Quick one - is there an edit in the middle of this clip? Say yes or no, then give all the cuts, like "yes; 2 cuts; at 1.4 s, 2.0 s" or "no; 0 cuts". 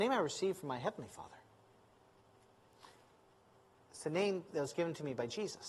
no; 0 cuts